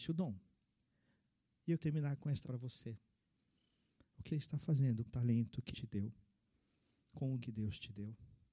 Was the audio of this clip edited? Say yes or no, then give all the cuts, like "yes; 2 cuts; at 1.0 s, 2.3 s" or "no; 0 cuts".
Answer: yes; 6 cuts; at 1.8 s, 2.4 s, 4.3 s, 5.1 s, 5.7 s, 7.4 s